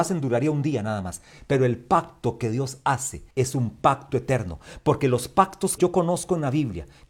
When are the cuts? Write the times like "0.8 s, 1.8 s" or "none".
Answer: 3.3 s, 5.8 s